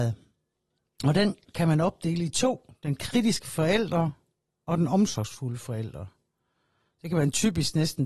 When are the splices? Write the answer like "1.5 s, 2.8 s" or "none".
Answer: none